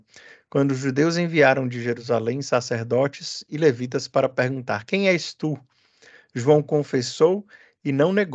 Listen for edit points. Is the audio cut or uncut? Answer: uncut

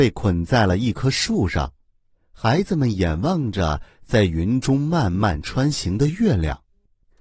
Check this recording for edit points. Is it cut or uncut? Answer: uncut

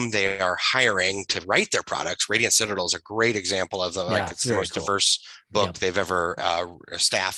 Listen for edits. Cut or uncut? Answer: uncut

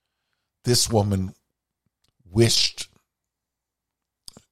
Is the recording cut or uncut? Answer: uncut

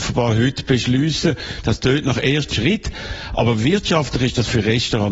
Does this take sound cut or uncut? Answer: cut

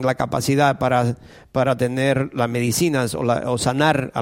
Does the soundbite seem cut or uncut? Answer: uncut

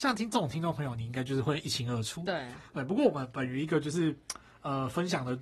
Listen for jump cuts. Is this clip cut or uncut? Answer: uncut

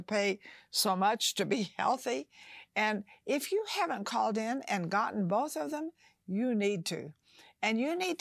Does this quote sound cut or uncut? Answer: uncut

